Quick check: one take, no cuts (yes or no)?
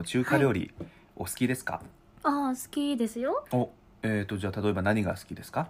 yes